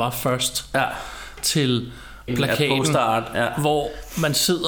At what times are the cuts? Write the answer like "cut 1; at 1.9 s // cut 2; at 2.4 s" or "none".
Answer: cut 1; at 2.3 s